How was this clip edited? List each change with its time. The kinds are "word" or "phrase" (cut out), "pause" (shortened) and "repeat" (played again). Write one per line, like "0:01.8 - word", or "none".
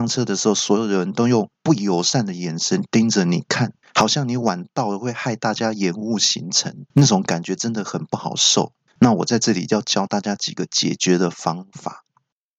0:03.8 - pause
0:06.9 - pause
0:08.9 - pause

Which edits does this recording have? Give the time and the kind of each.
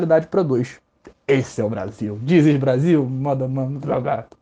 none

